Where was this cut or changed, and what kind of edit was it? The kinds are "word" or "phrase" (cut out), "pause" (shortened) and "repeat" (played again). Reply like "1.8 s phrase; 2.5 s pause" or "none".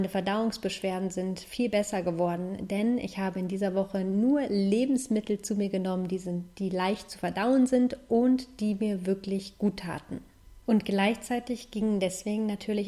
10.6 s pause